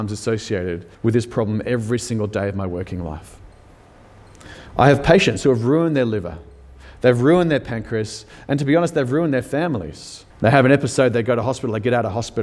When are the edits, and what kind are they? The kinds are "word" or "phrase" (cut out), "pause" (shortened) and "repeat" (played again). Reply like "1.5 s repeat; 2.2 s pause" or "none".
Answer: 0.9 s pause; 10.3 s pause